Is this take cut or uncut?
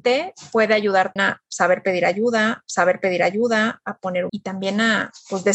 cut